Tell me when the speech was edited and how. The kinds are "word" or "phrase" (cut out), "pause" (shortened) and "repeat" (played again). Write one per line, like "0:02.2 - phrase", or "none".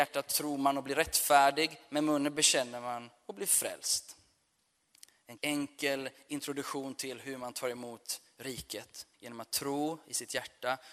0:05.4 - word
0:09.1 - pause